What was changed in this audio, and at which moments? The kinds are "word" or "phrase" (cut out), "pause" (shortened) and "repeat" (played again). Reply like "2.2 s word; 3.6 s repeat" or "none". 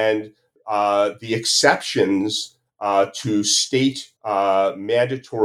4.2 s pause